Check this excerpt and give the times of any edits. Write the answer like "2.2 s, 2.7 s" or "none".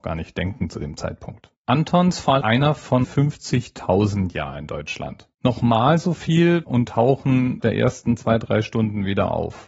1.6 s, 2.4 s, 3.0 s, 4.3 s, 5.3 s, 6.6 s, 7.6 s